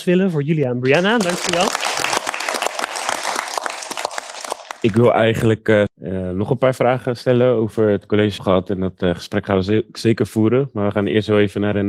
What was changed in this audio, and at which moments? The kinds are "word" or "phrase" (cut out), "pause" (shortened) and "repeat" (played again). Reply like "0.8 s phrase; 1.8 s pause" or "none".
5.9 s phrase; 8.4 s phrase